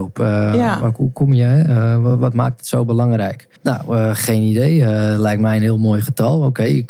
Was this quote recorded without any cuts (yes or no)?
no